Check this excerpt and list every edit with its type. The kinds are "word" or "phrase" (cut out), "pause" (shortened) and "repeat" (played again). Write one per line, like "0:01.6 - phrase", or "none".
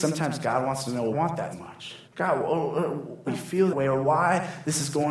0:01.1 - phrase
0:01.5 - word
0:02.0 - pause
0:03.3 - phrase
0:03.7 - word